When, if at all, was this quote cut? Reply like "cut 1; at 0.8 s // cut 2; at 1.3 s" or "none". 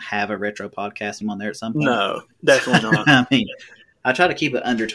cut 1; at 1.2 s